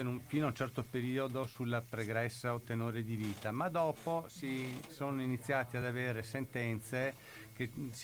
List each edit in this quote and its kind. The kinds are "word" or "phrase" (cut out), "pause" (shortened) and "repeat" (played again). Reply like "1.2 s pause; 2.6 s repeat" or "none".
none